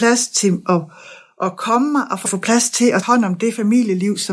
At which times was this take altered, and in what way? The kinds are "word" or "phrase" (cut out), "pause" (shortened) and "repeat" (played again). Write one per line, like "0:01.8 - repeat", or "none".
0:02.3 - phrase
0:03.0 - word